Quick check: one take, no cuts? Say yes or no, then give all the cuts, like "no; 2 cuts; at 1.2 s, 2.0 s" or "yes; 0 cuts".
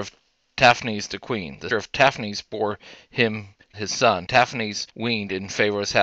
no; 4 cuts; at 1.7 s, 3.7 s, 4.3 s, 4.9 s